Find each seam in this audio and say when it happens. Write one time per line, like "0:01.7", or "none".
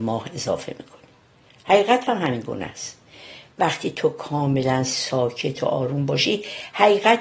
none